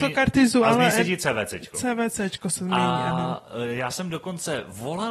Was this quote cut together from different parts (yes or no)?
no